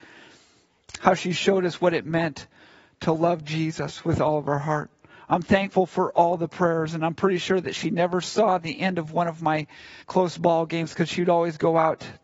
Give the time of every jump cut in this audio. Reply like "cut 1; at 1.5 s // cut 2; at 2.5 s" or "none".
cut 1; at 10.0 s